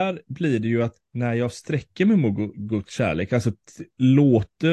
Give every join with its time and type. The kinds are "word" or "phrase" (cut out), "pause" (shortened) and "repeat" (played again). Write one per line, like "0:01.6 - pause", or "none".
0:01.0 - pause